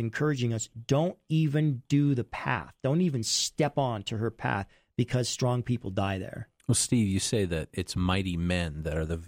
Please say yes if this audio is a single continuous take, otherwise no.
yes